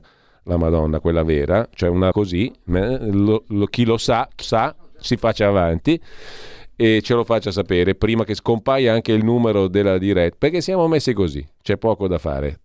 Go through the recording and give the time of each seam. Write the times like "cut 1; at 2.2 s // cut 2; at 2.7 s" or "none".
cut 1; at 2.1 s // cut 2; at 4.4 s